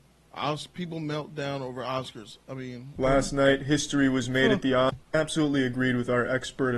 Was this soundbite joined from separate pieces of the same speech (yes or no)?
yes